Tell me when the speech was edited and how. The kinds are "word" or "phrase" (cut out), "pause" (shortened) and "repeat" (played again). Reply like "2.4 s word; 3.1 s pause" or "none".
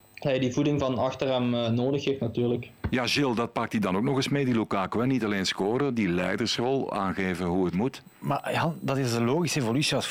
7.7 s word